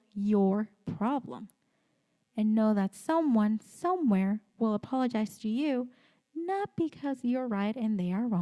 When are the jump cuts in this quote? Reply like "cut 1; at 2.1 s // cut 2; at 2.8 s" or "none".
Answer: none